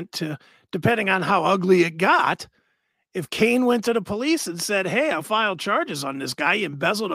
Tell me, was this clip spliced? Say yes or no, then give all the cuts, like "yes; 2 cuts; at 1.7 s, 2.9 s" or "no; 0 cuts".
yes; 1 cut; at 5.2 s